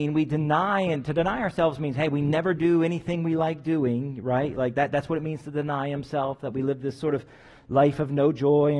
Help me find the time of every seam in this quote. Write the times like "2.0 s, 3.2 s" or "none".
none